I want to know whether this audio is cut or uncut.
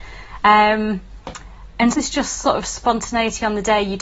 cut